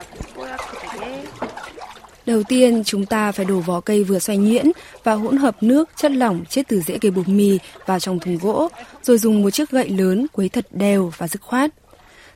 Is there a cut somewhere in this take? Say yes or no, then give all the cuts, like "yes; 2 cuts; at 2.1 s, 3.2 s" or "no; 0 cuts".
no; 0 cuts